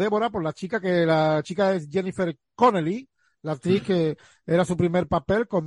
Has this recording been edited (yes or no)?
no